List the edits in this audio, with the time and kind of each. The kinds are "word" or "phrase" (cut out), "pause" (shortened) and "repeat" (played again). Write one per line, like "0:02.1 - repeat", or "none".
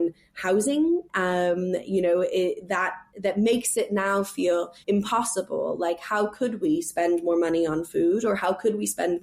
0:03.1 - pause
0:04.8 - pause